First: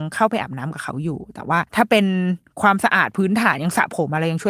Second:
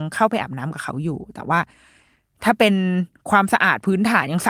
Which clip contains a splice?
first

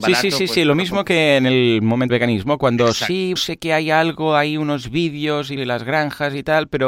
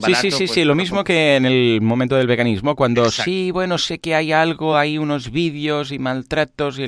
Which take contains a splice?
first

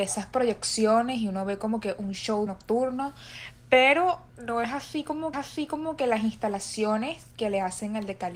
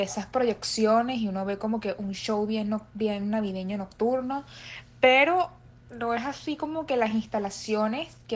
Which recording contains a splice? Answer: first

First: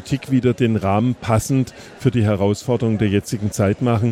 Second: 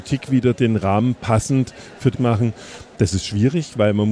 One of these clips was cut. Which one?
second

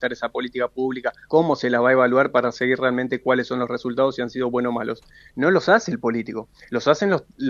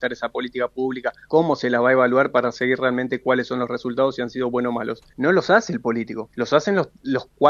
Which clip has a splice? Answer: second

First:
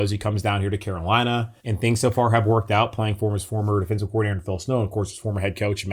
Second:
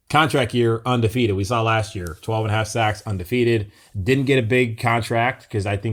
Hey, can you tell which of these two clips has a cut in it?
first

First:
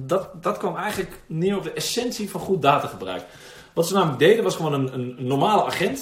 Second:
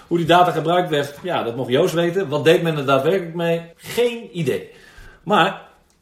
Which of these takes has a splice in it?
second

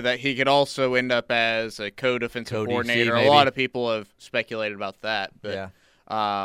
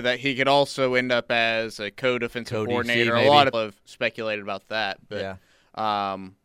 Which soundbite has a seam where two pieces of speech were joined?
second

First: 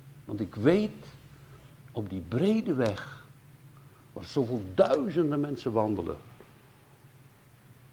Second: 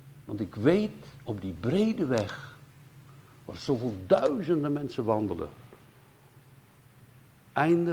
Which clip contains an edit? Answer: second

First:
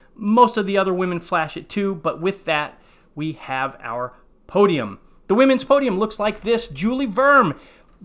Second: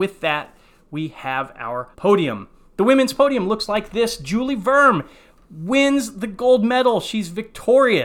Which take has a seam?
second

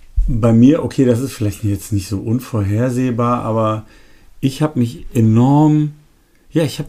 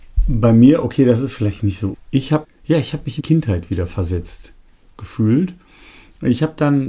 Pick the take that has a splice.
second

